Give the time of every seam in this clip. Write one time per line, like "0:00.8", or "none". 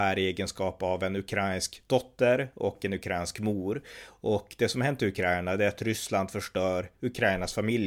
none

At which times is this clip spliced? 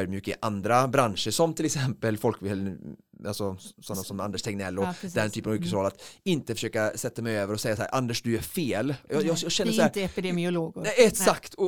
none

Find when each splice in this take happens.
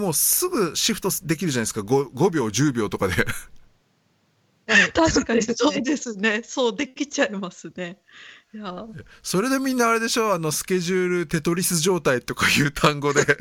none

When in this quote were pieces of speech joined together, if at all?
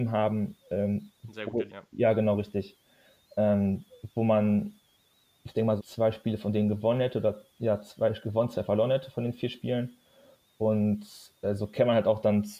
0:01.7
0:05.8

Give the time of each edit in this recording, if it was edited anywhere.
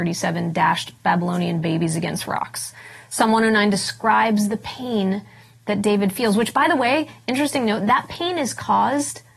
none

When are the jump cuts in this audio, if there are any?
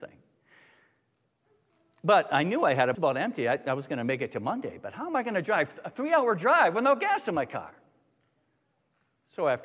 0:02.9

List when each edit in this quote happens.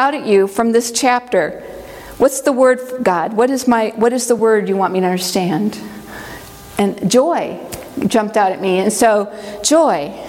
none

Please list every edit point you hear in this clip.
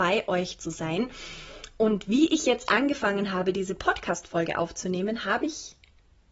none

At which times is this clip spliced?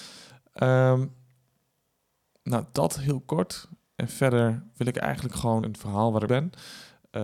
0:03.8
0:05.6
0:06.3

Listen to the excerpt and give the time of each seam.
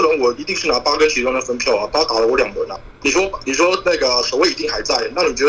0:03.0

